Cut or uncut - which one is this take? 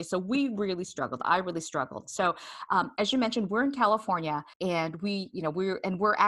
cut